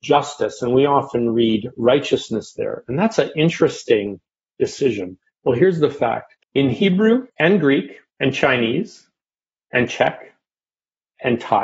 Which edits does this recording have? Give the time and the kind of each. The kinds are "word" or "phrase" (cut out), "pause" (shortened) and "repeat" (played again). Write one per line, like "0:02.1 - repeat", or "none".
0:05.2 - pause
0:06.4 - pause
0:07.3 - pause
0:08.1 - pause